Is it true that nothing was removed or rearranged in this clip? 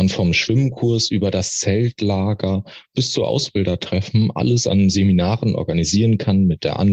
yes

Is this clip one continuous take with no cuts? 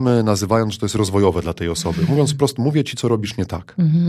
yes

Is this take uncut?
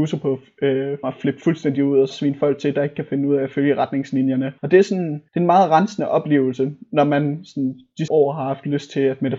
no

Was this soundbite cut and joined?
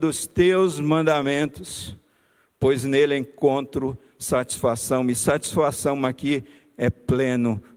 no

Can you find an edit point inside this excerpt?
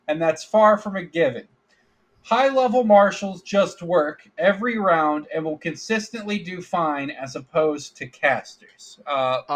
no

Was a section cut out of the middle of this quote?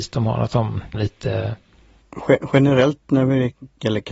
yes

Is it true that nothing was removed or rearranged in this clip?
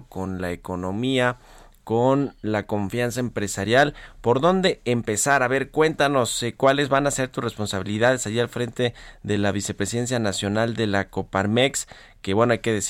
yes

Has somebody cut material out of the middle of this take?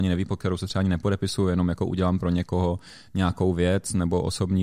no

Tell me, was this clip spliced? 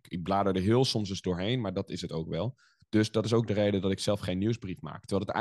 no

